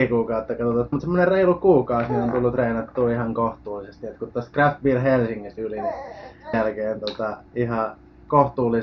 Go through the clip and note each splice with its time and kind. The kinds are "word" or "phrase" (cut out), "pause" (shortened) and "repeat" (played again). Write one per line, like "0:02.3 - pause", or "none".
0:00.9 - word
0:05.6 - word
0:06.5 - word
0:07.5 - pause